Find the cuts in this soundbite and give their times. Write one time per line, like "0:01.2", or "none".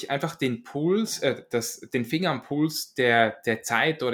none